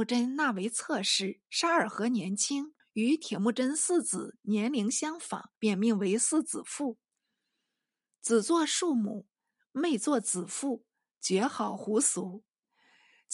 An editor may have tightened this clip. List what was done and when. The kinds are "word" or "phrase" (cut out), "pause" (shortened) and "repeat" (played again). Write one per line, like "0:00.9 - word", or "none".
0:01.5 - pause
0:02.8 - pause
0:05.6 - pause